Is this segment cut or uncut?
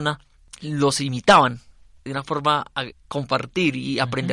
cut